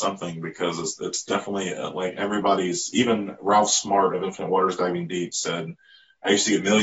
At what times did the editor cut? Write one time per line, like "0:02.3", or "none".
none

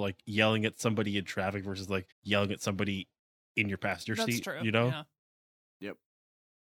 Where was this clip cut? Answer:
0:02.1

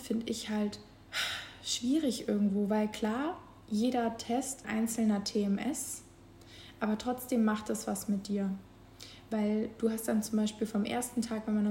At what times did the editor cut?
0:04.6

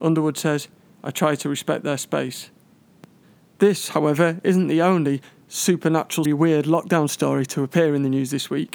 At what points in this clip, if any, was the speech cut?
0:03.2
0:06.2

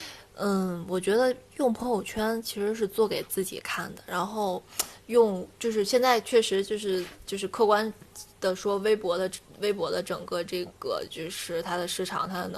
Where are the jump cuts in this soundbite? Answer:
0:05.5

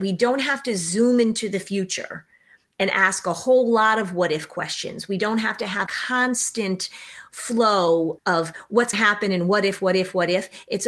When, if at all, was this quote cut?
0:05.9
0:08.2
0:08.9

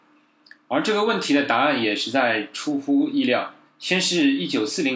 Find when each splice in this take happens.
0:03.6

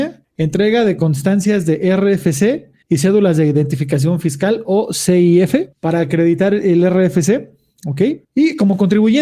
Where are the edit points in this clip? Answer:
0:02.8
0:05.7
0:08.2

